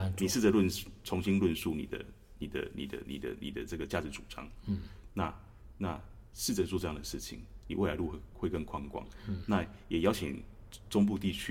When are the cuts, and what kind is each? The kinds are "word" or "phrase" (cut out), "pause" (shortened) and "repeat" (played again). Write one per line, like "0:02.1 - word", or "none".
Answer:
none

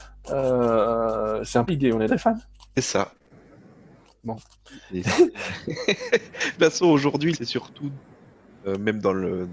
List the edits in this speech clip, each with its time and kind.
0:01.7 - word
0:02.1 - word
0:02.7 - word
0:06.6 - word
0:07.3 - word

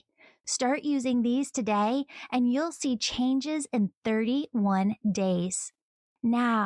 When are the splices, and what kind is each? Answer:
none

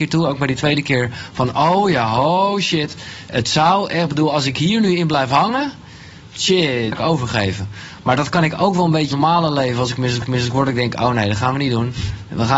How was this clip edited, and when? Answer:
0:06.9 - phrase
0:09.1 - word
0:10.2 - repeat

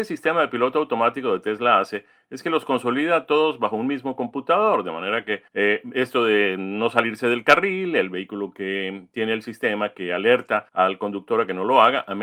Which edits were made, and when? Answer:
0:05.5 - pause
0:10.7 - pause

